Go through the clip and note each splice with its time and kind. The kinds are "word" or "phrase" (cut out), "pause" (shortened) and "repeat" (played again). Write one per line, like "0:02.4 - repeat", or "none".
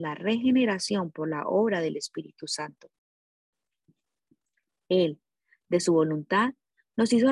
none

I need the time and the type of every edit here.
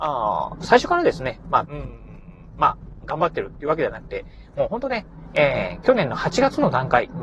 0:01.6 - phrase

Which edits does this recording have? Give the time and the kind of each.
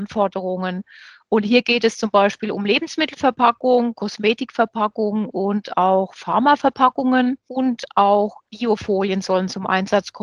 none

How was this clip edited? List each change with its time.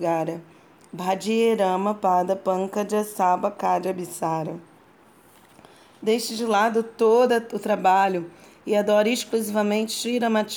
none

